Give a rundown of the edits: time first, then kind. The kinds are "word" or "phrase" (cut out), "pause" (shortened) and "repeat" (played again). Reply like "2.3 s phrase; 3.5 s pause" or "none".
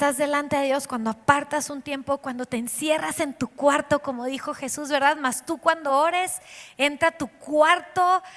none